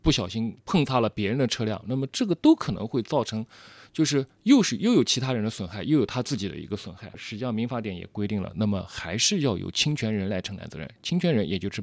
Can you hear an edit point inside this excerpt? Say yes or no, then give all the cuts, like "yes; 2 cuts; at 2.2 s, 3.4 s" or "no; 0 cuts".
no; 0 cuts